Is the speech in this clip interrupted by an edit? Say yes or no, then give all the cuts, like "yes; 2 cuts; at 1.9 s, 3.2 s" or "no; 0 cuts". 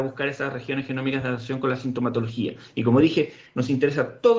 no; 0 cuts